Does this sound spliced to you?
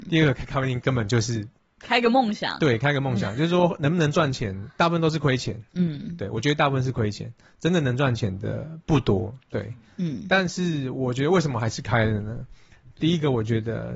yes; 1 cut; at 1.8 s

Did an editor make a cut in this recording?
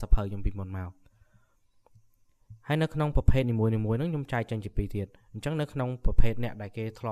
no; 0 cuts

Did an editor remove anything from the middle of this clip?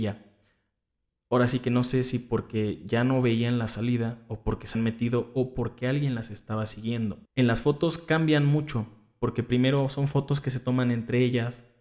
yes; 2 cuts; at 4.7 s, 7.3 s

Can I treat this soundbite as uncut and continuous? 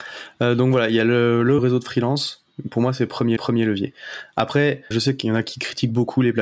no; 3 cuts; at 1.6 s, 3.4 s, 4.9 s

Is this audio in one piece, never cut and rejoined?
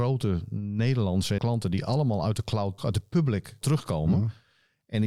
no; 3 cuts; at 1.4 s, 2.8 s, 3.6 s

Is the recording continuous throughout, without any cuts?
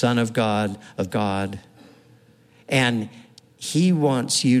no; 1 cut; at 1.1 s

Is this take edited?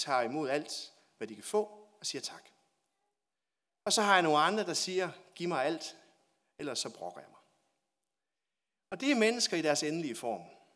no; 0 cuts

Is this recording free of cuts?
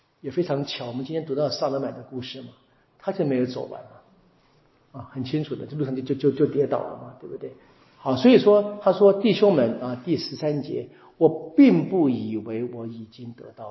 yes; 0 cuts

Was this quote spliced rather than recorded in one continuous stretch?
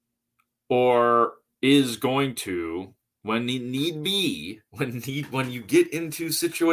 no; 0 cuts

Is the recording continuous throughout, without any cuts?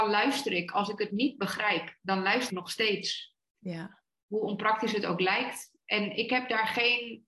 no; 1 cut; at 2.5 s

